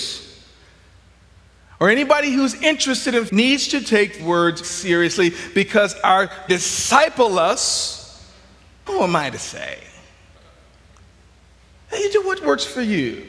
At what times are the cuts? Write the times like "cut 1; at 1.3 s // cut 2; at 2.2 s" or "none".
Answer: cut 1; at 3.3 s // cut 2; at 4.2 s // cut 3; at 4.6 s // cut 4; at 6.5 s // cut 5; at 8.9 s